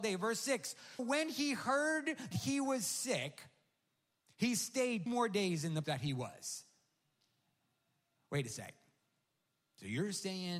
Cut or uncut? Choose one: cut